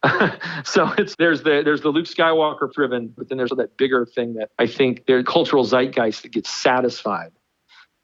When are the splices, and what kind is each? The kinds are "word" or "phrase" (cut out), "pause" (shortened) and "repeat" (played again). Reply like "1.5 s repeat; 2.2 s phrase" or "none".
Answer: 1.1 s word; 2.7 s word; 3.2 s word; 3.5 s word; 4.5 s pause; 5.2 s phrase